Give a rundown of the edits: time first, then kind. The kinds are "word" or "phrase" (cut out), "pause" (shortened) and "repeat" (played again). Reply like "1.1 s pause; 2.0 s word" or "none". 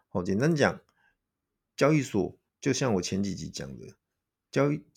2.5 s pause